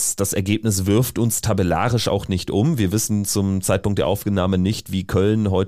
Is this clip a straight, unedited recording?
yes; 0 cuts

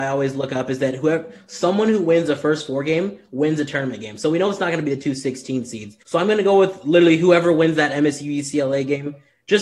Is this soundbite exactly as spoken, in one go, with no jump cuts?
no; 1 cut; at 6.0 s

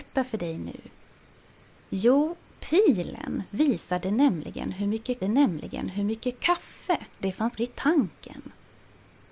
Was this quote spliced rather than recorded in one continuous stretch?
yes; 2 cuts; at 5.2 s, 7.6 s

